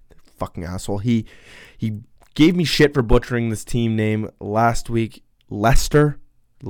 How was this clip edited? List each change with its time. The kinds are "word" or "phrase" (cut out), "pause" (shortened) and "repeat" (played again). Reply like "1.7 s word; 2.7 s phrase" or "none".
none